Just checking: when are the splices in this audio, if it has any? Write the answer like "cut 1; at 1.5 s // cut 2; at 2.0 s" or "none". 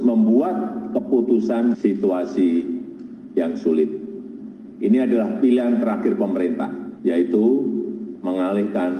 cut 1; at 1.7 s